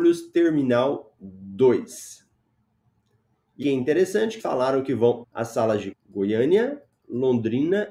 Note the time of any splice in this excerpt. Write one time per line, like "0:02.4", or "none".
0:03.6
0:04.4
0:05.2
0:05.9